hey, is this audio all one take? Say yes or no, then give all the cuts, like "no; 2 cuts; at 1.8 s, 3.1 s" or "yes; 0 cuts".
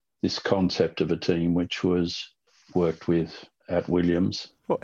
no; 1 cut; at 2.7 s